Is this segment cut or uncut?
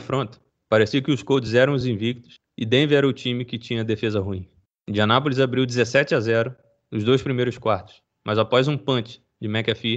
uncut